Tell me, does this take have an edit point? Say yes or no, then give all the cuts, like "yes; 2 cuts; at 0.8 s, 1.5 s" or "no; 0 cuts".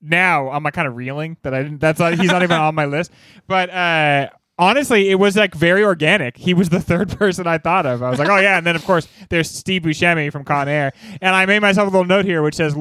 no; 0 cuts